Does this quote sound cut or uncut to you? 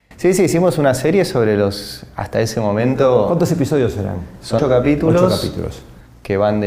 cut